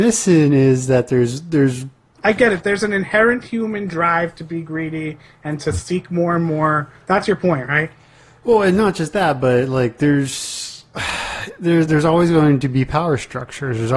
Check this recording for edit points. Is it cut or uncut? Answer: uncut